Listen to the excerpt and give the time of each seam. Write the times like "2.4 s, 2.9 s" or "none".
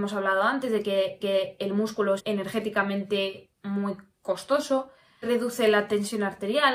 1.2 s, 2.2 s, 3.5 s, 5.2 s